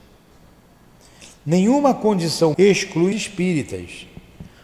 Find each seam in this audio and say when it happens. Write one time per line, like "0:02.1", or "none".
0:02.5
0:03.1